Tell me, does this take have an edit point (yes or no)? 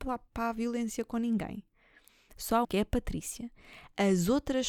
yes